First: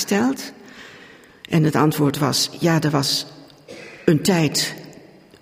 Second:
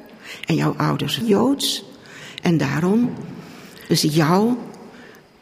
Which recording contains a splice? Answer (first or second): second